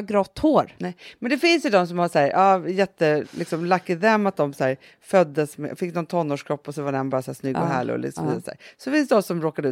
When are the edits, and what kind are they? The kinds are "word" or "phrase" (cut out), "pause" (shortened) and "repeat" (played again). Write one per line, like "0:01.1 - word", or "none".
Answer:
0:03.2 - word